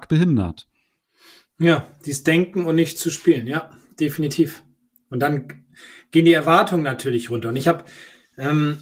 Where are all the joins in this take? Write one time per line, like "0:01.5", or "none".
none